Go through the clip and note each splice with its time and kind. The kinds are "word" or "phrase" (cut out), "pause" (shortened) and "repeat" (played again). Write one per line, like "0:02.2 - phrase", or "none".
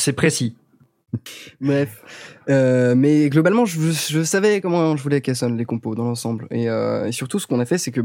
none